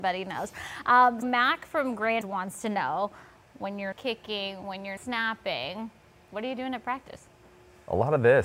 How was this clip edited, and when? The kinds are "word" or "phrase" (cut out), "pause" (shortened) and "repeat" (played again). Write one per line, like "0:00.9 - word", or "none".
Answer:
0:01.2 - word
0:02.2 - word
0:03.9 - word
0:05.0 - word

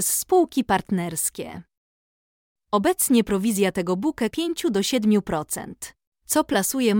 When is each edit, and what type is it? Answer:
0:04.3 - phrase

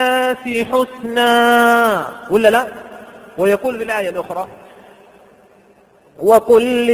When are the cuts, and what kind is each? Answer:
none

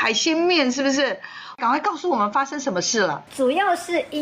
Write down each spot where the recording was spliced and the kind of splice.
0:03.3 - pause

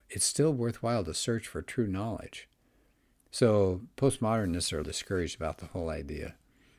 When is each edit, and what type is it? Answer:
0:04.8 - word

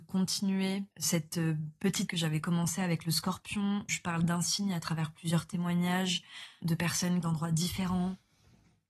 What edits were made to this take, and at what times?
0:00.9 - pause
0:02.1 - word
0:03.9 - word
0:07.2 - phrase

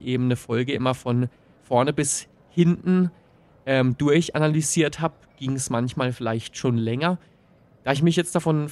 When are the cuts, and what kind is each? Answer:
none

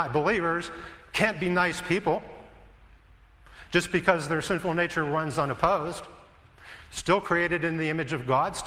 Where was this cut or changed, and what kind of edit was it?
none

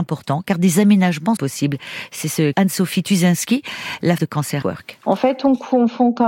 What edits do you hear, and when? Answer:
0:01.4 - word
0:02.5 - word
0:04.2 - word
0:04.6 - word

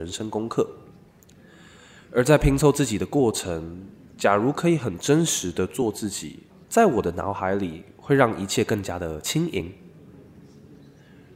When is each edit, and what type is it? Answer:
0:06.5 - pause

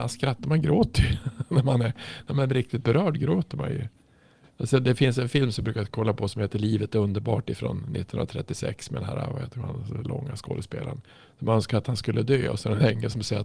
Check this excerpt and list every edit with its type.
none

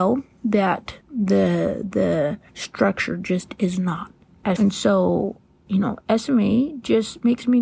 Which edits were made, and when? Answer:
0:01.0 - pause
0:02.5 - pause
0:04.6 - word

